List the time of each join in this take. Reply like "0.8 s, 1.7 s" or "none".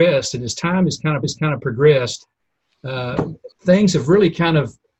1.2 s, 3.5 s